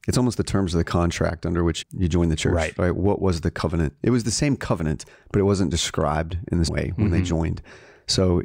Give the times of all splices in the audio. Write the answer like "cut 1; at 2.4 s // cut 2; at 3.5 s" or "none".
cut 1; at 1.8 s // cut 2; at 6.7 s

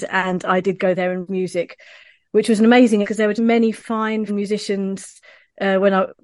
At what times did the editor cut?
cut 1; at 1.3 s // cut 2; at 3.0 s // cut 3; at 3.4 s // cut 4; at 4.3 s

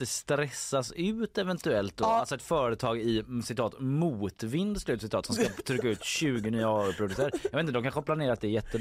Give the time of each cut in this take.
none

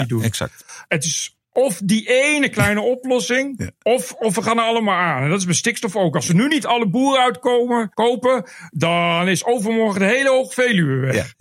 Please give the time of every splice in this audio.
cut 1; at 1.4 s // cut 2; at 7.9 s

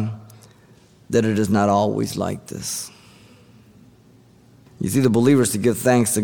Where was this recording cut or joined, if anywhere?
none

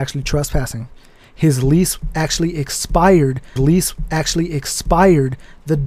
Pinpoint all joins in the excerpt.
cut 1; at 3.6 s

